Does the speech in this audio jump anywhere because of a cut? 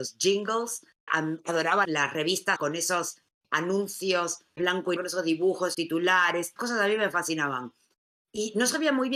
yes; 7 cuts; at 1.1 s, 1.8 s, 2.6 s, 4.6 s, 5.0 s, 5.7 s, 6.6 s

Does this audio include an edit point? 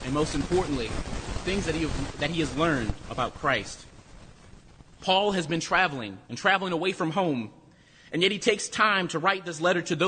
yes; 1 cut; at 6.2 s

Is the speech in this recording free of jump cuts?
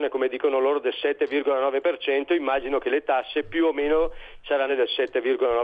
no; 1 cut; at 4.7 s

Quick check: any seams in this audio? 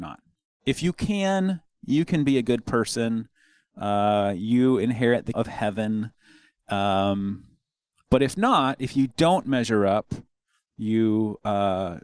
yes; 1 cut; at 5.3 s

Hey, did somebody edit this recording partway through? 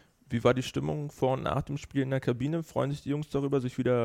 no; 0 cuts

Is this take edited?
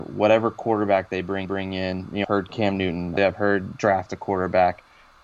yes; 3 cuts; at 1.4 s, 2.2 s, 3.2 s

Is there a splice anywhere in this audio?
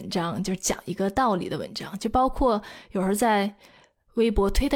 no; 0 cuts

